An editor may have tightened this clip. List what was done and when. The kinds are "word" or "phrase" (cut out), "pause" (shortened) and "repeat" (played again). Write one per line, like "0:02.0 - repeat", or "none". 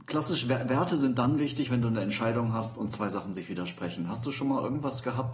none